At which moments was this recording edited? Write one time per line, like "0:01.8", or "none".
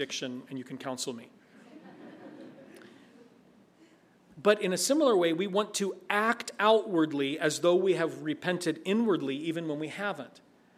none